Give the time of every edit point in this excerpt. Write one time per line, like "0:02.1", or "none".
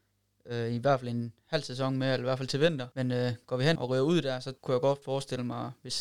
0:02.9
0:03.8
0:04.6